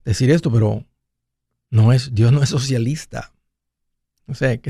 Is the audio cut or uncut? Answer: cut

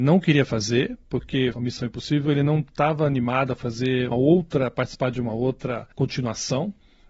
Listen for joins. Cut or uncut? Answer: cut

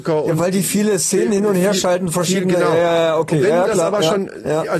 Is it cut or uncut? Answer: uncut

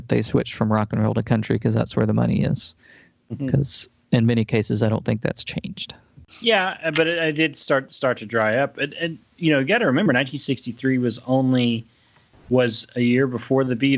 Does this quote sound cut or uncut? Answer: uncut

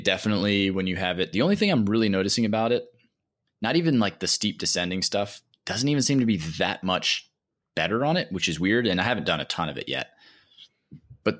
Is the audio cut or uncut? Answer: uncut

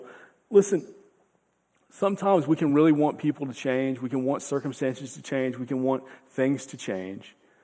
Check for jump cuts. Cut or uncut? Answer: uncut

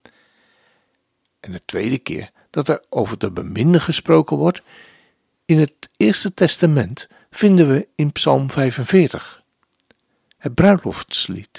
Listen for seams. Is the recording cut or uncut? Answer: uncut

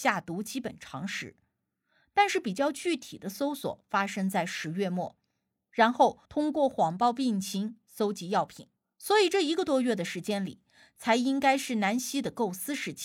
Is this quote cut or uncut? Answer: cut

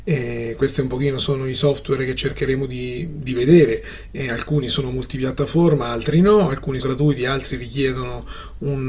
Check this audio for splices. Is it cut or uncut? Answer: cut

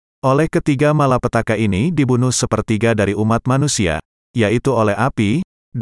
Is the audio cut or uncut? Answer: uncut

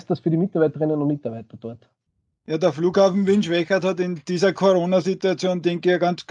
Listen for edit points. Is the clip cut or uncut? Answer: cut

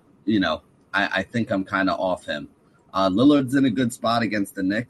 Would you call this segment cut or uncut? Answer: uncut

